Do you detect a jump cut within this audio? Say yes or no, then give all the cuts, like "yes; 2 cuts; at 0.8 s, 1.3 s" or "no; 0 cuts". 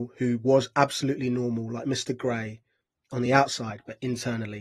no; 0 cuts